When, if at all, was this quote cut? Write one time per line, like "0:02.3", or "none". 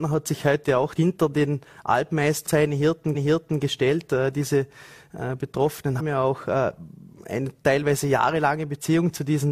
0:01.0
0:02.5
0:03.1
0:06.0